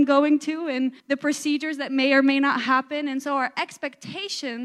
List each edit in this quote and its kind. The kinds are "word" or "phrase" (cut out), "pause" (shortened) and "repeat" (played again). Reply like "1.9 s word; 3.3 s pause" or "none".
1.0 s pause

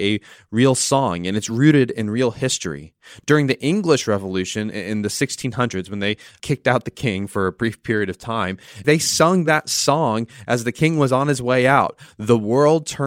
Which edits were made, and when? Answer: none

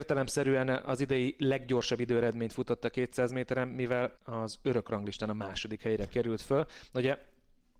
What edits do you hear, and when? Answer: 4.2 s pause

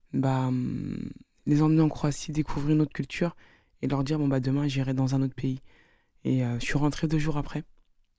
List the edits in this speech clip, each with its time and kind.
none

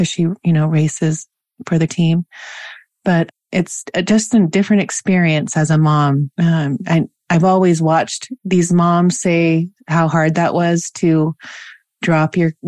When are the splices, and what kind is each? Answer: 1.9 s word; 6.3 s pause; 8.4 s pause

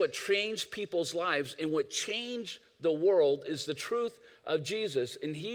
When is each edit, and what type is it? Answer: none

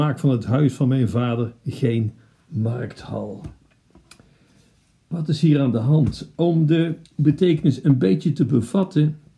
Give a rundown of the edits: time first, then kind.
7.1 s pause

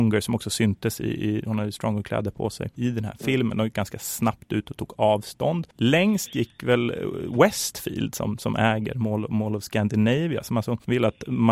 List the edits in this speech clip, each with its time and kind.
5.7 s pause

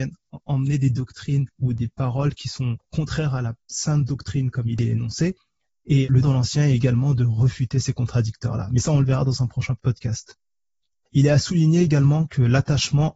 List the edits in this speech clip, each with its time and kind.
6.2 s word

